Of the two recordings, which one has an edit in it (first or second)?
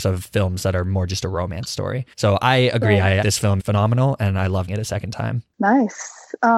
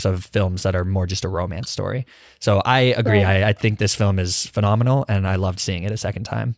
first